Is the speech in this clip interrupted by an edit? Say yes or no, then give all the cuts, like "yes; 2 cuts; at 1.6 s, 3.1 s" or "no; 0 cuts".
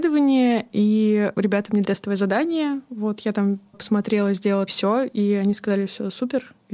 yes; 4 cuts; at 1.3 s, 1.8 s, 3.7 s, 4.7 s